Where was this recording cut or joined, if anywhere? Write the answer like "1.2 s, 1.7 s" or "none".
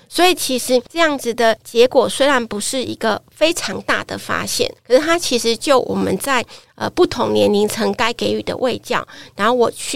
4.8 s